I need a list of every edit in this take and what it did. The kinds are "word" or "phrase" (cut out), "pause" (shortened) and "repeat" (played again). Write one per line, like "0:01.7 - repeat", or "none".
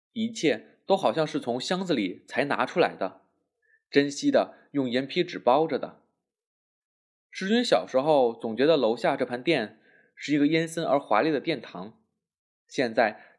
none